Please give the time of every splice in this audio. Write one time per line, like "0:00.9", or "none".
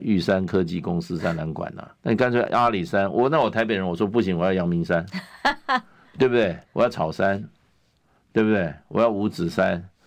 0:02.0
0:06.6